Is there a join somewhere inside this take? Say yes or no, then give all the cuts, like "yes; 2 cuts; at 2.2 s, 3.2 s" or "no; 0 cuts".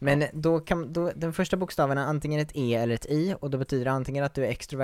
no; 0 cuts